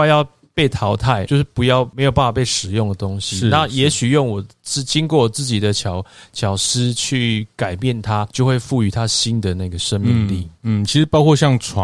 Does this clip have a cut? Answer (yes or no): yes